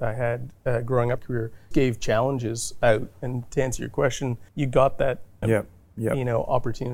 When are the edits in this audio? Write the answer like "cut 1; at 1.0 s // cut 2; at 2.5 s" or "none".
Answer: cut 1; at 1.2 s // cut 2; at 1.7 s // cut 3; at 4.5 s // cut 4; at 5.4 s